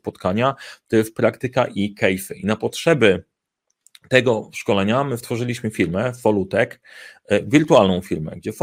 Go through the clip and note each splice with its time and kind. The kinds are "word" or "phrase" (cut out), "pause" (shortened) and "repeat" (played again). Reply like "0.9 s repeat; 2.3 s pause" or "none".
none